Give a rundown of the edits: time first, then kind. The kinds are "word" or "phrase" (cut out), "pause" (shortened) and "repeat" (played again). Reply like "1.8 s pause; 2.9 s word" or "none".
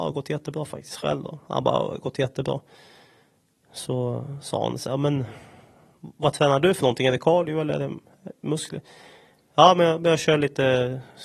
none